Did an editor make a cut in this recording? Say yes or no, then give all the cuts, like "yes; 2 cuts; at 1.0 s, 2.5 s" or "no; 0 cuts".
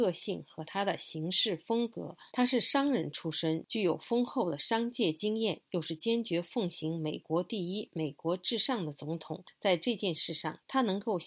yes; 1 cut; at 2.3 s